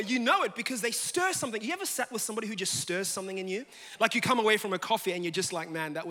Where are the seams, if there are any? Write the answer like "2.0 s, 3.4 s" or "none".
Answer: none